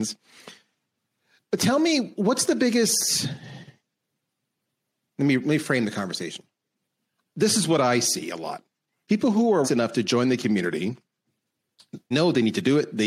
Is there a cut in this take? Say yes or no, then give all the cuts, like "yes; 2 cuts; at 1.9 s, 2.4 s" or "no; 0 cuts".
yes; 2 cuts; at 9.6 s, 12.1 s